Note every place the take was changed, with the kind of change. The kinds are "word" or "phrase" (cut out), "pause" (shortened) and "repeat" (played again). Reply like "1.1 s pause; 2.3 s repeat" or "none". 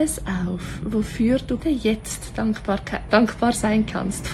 1.6 s word; 3.1 s word